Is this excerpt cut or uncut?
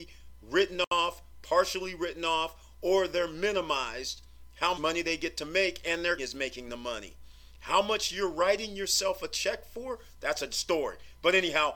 cut